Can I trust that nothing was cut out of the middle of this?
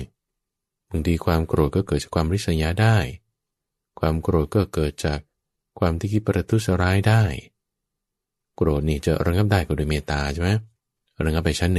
yes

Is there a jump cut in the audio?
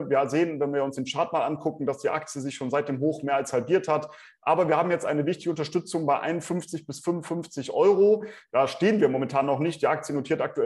no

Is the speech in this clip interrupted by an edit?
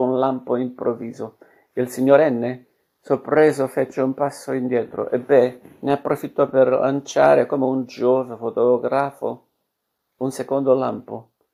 no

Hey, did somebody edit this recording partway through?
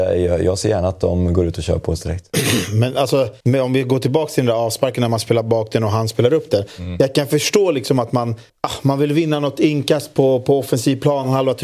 yes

